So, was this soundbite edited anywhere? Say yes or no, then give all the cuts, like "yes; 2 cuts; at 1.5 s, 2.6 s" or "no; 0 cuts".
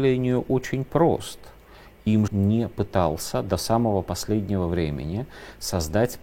yes; 1 cut; at 2.3 s